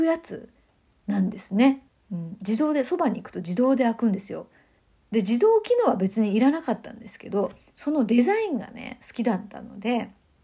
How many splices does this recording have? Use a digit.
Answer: 2